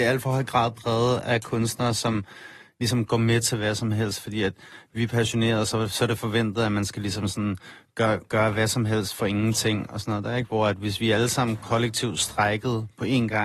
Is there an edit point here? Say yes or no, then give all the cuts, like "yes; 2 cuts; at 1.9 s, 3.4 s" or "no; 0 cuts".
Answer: no; 0 cuts